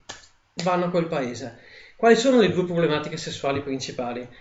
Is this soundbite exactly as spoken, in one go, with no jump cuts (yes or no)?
yes